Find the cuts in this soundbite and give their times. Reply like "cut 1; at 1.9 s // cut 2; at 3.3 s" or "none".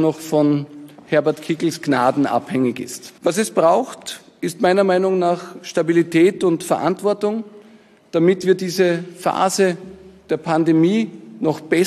cut 1; at 3.2 s